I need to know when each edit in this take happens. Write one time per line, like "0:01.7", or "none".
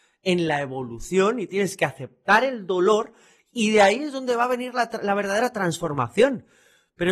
none